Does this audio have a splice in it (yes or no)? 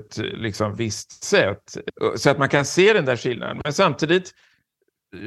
no